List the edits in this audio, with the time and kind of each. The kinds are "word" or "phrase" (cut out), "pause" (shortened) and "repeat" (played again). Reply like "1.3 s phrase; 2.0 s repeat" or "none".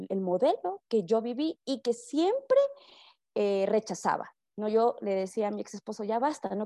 none